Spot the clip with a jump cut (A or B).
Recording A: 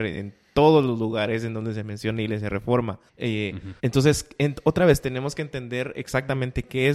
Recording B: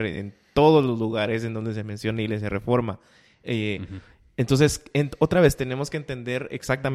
A